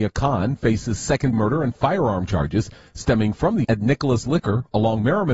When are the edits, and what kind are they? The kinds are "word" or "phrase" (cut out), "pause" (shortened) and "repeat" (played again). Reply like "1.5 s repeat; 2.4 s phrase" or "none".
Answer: 1.3 s word; 1.8 s word; 3.6 s word